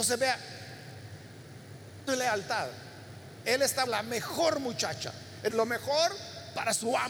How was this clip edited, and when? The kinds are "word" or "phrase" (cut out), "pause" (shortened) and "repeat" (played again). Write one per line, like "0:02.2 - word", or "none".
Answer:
0:02.1 - word
0:03.9 - word
0:05.5 - word